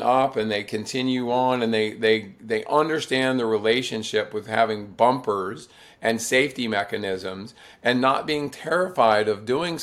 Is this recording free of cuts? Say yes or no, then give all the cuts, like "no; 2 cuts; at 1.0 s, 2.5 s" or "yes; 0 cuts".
yes; 0 cuts